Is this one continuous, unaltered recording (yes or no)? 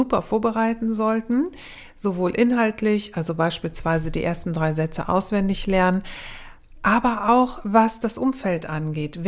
yes